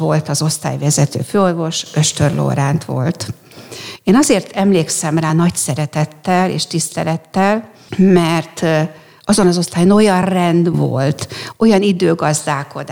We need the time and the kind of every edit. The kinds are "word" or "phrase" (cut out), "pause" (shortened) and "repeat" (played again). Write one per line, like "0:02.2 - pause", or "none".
none

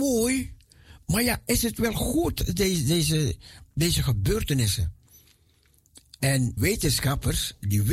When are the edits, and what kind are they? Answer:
0:06.6 - word

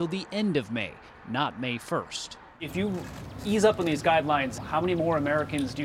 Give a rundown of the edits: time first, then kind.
0:04.6 - word

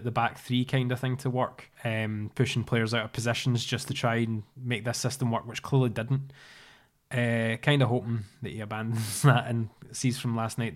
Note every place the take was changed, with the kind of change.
0:01.7 - pause

